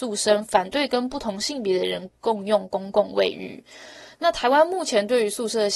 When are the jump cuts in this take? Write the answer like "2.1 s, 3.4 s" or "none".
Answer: none